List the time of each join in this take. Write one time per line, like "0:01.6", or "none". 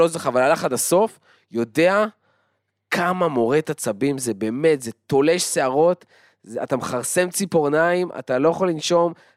none